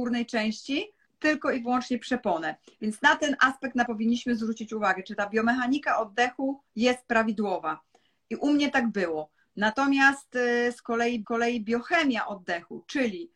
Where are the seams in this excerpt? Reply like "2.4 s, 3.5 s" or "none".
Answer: 1.1 s, 3.9 s, 6.7 s, 11.2 s